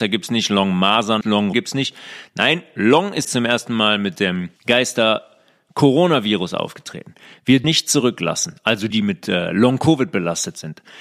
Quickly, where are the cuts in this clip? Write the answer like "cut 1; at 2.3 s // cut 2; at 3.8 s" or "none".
cut 1; at 1.2 s // cut 2; at 1.5 s // cut 3; at 3.2 s // cut 4; at 4.6 s // cut 5; at 7.6 s // cut 6; at 8.9 s